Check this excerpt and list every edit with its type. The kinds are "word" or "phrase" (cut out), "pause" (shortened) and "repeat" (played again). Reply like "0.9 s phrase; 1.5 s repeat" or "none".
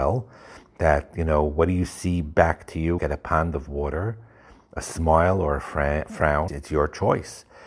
3.0 s phrase; 6.5 s word